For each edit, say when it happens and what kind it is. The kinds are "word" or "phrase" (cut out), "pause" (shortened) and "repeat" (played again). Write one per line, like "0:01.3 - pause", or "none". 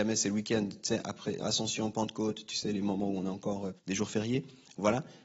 0:03.8 - pause